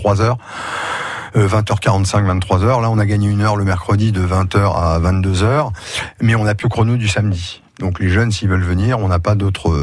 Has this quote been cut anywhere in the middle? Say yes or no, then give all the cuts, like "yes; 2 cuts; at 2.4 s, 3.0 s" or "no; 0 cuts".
yes; 2 cuts; at 6.6 s, 7.7 s